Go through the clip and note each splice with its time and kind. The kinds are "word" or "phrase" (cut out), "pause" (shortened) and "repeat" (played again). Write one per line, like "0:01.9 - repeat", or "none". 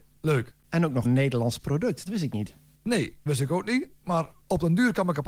0:01.0 - word
0:02.1 - word
0:03.3 - word